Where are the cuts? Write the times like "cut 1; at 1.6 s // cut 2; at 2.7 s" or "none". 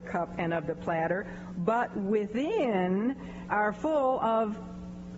cut 1; at 3.5 s